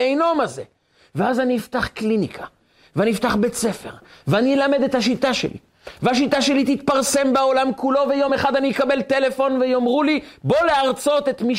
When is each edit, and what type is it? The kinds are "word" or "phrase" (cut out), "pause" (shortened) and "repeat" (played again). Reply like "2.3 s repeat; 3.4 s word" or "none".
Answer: none